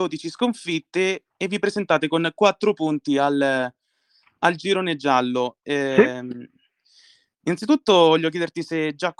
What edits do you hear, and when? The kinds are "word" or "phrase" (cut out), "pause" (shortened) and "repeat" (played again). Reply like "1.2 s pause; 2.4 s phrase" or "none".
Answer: none